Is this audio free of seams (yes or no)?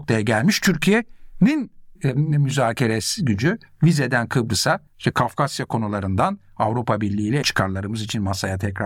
no